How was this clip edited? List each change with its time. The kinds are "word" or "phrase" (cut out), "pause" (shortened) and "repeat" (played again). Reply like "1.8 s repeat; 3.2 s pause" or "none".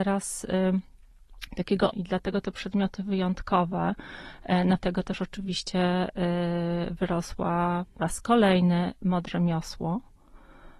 1.9 s word; 4.8 s word; 8.0 s word; 9.3 s word